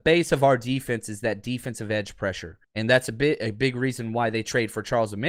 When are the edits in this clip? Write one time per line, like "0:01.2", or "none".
0:02.6